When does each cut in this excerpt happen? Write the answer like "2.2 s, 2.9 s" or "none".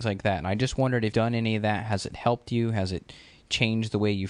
1.1 s